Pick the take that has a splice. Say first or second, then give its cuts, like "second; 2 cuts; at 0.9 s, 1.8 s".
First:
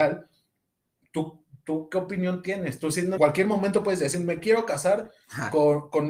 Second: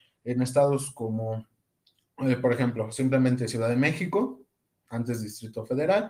first; 1 cut; at 3.2 s